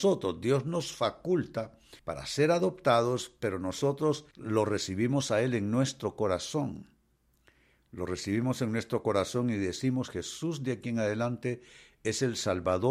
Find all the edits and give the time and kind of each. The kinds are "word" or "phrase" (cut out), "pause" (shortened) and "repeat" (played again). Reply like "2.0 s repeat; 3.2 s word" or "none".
2.0 s pause; 4.3 s pause